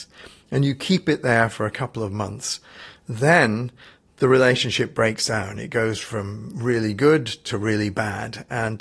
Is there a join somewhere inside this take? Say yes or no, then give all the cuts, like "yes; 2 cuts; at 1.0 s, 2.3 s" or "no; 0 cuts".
no; 0 cuts